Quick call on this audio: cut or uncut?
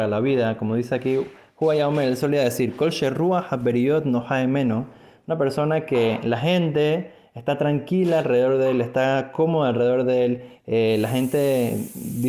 uncut